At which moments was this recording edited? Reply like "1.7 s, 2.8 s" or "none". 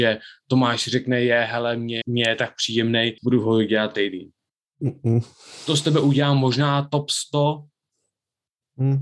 2.0 s, 3.2 s, 3.9 s